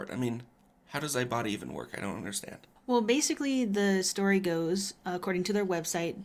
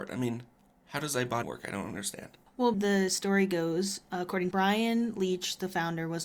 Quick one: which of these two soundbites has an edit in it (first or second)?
second